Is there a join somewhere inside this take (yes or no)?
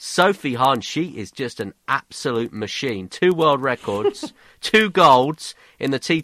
no